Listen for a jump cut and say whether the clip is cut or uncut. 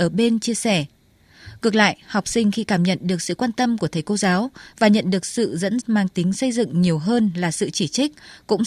cut